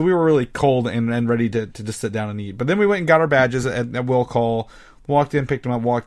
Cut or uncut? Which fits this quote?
uncut